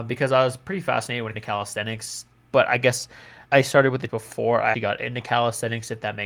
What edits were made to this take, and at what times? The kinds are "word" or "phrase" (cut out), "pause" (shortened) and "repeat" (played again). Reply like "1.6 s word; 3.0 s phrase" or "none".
1.3 s word; 3.5 s pause; 4.1 s word; 4.7 s word